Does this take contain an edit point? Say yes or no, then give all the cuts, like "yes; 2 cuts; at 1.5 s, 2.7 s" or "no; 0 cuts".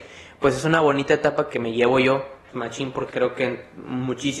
yes; 3 cuts; at 1.5 s, 2.5 s, 3.1 s